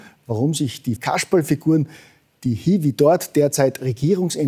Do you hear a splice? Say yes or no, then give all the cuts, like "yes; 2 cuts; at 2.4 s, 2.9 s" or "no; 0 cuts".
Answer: yes; 1 cut; at 1.0 s